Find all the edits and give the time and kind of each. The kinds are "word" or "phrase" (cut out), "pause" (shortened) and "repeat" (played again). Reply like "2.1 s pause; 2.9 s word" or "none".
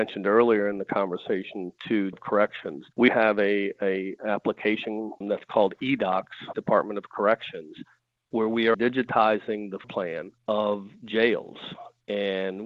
2.1 s word; 3.1 s word; 6.5 s word; 8.7 s word; 9.8 s word